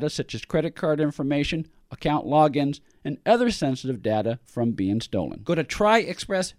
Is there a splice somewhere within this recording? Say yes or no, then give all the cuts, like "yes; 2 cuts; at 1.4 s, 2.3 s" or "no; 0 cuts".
no; 0 cuts